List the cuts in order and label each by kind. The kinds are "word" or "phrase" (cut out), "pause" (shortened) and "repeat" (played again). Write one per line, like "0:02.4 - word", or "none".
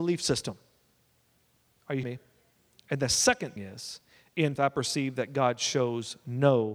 0:02.0 - word
0:03.6 - word
0:04.6 - word